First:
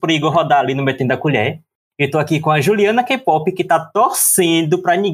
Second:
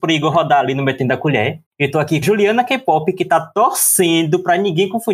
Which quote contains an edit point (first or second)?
second